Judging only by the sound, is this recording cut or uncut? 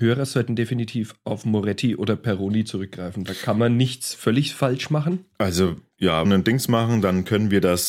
cut